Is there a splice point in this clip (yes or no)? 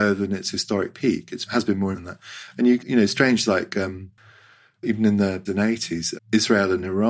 yes